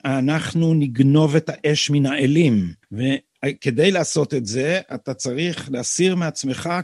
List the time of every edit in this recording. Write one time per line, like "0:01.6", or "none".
0:02.8